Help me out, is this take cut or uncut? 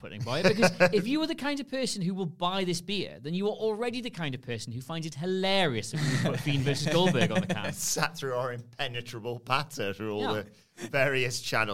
uncut